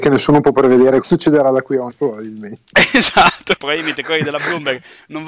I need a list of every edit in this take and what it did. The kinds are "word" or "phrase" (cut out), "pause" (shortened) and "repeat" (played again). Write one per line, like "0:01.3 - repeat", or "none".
0:01.0 - word
0:01.9 - word
0:03.6 - word